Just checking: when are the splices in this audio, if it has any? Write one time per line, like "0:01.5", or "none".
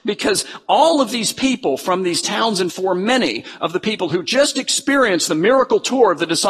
0:02.7